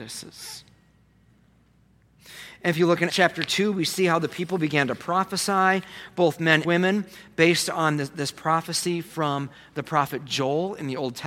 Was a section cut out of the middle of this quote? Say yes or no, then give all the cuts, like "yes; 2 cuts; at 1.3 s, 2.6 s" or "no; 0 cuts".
yes; 2 cuts; at 3.1 s, 6.6 s